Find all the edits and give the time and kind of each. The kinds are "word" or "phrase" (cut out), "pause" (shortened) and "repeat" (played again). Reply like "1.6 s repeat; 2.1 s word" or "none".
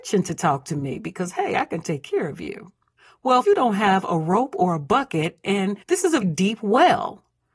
3.4 s phrase; 5.8 s pause; 6.2 s word